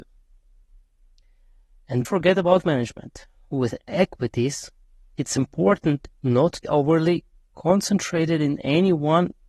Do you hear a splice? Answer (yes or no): yes